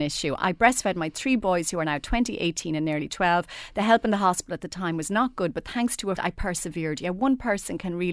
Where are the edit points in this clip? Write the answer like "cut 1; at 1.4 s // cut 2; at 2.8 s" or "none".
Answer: cut 1; at 6.2 s